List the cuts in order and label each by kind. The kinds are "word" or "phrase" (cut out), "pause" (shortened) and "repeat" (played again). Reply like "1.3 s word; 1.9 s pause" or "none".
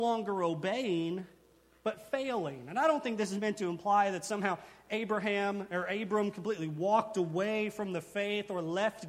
none